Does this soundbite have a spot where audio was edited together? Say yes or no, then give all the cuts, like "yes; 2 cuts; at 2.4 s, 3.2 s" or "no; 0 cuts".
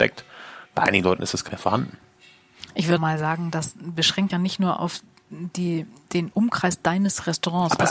yes; 3 cuts; at 1.5 s, 3.0 s, 4.3 s